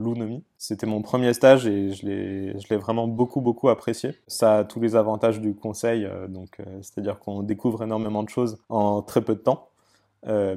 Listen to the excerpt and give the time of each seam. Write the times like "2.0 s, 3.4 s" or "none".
8.6 s